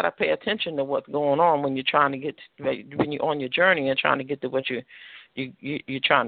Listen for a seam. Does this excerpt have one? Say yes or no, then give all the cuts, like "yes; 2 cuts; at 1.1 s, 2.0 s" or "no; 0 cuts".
no; 0 cuts